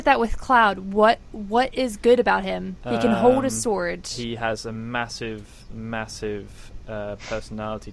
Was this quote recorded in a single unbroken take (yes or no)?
yes